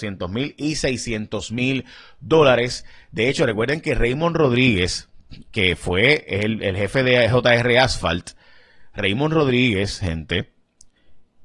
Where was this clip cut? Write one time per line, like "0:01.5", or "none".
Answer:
none